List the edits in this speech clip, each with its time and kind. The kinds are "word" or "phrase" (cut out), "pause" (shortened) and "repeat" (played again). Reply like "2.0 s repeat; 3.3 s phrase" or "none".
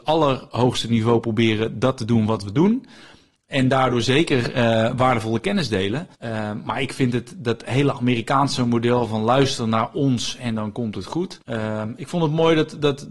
6.1 s pause; 11.4 s pause